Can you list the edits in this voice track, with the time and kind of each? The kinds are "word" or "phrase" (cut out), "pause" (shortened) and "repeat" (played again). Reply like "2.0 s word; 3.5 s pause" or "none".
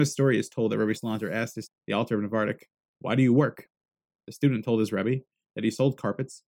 1.0 s word; 1.7 s word